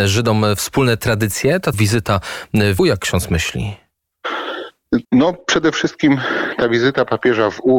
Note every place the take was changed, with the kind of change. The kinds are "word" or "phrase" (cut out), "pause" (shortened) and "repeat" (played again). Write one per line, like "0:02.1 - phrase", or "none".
0:01.7 - word
0:02.8 - word
0:05.0 - pause